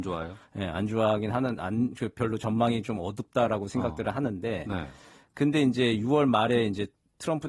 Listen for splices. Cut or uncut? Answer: uncut